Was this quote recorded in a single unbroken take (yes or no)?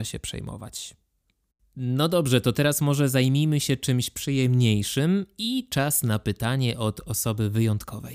yes